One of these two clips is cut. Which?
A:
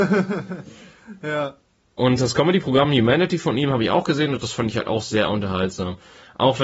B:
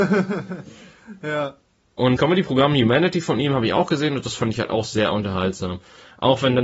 B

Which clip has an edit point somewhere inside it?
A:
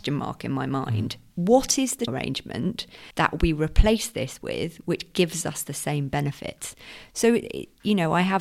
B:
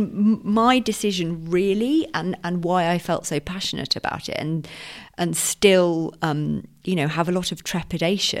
A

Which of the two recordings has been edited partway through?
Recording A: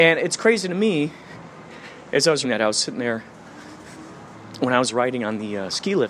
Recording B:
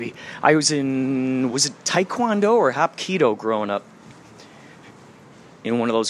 A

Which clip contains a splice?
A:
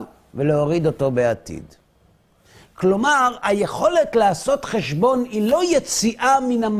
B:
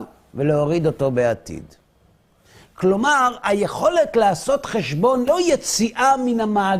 B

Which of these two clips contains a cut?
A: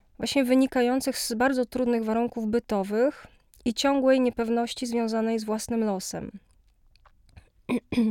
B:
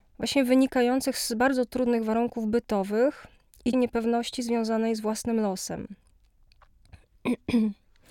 B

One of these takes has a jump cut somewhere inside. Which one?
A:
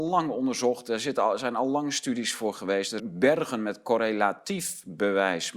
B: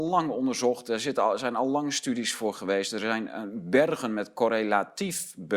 A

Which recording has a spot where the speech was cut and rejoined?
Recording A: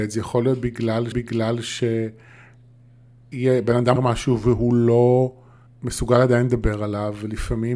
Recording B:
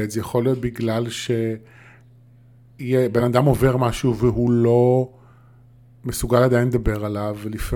A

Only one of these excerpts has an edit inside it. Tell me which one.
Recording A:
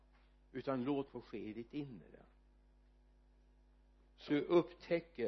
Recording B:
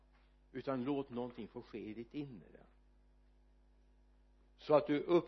A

